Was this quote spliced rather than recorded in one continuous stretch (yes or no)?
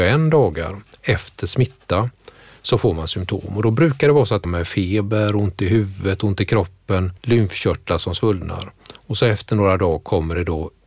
yes